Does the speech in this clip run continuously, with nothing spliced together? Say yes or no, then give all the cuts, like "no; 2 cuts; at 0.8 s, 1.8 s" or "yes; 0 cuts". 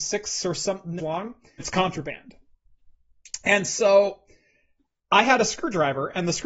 no; 2 cuts; at 1.0 s, 1.6 s